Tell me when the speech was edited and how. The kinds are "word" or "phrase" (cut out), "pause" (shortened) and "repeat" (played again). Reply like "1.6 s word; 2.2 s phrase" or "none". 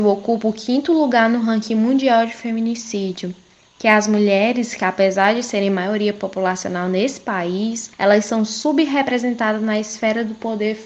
none

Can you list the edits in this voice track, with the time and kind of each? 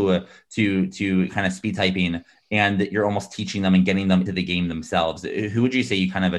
4.3 s word

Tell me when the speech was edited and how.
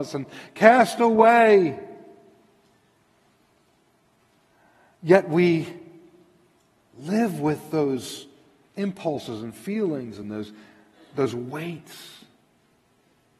none

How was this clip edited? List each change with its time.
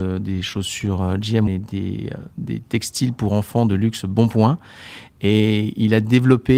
1.5 s word; 2.3 s pause

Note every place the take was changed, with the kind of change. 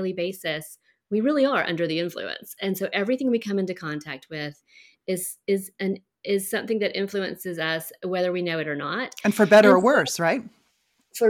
none

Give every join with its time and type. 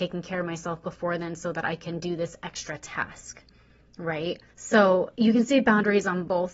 4.5 s pause

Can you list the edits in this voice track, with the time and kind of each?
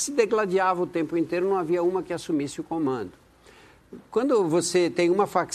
none

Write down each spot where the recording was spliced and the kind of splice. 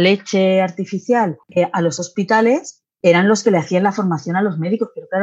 1.4 s pause; 2.9 s pause

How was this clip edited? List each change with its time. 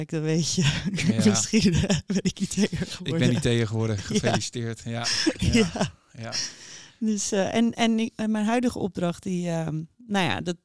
none

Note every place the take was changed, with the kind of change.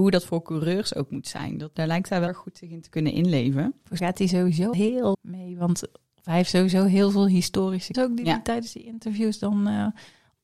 1.7 s word; 2.3 s word; 4.0 s word; 4.7 s word; 5.1 s word; 7.9 s word

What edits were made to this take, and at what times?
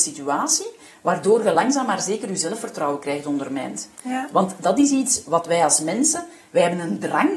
none

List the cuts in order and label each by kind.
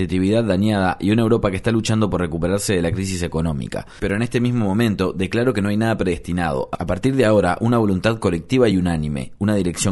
none

